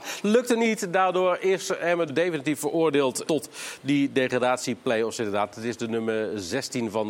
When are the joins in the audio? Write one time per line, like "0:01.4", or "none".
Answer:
0:02.1
0:03.3